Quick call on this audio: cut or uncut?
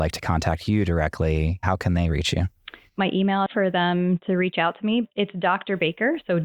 cut